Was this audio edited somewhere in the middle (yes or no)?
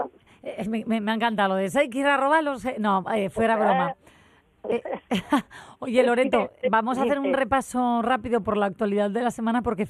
no